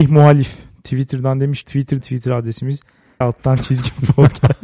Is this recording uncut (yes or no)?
no